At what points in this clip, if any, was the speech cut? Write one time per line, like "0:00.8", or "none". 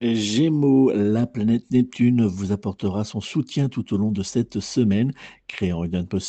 none